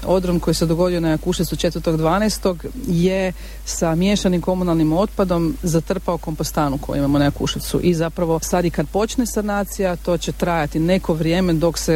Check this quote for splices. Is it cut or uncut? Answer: uncut